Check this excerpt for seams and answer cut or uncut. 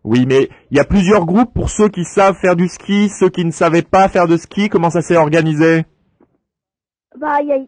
uncut